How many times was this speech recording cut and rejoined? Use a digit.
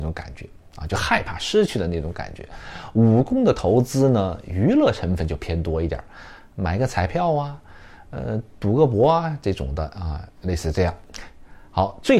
1